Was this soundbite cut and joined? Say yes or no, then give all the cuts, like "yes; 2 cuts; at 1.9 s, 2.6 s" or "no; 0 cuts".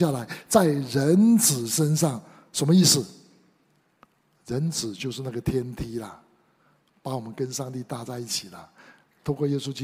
no; 0 cuts